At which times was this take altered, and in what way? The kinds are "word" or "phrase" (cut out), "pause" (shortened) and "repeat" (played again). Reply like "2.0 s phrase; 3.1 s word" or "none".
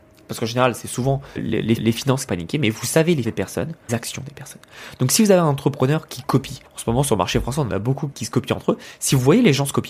1.4 s word; 1.8 s repeat; 2.3 s word; 3.2 s word; 3.9 s phrase; 6.6 s pause; 8.1 s word